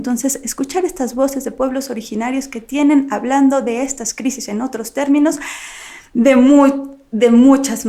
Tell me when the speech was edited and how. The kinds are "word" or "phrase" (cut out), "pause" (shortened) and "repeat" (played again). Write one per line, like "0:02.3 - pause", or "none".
none